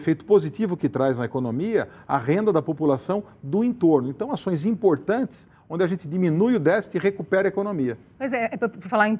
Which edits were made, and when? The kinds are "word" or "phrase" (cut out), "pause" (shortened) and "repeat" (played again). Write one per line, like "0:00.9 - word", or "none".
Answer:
none